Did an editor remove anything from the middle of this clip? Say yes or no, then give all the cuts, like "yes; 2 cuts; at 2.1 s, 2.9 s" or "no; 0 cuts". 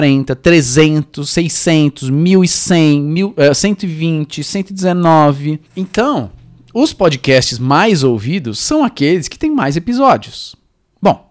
yes; 1 cut; at 5.7 s